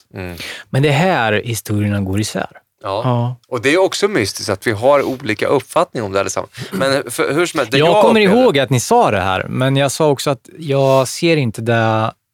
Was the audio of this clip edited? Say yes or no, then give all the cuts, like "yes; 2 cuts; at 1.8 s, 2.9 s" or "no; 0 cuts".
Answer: yes; 1 cut; at 3.4 s